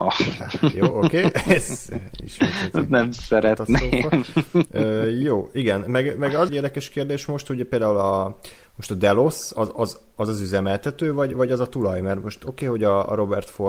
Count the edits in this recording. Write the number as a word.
two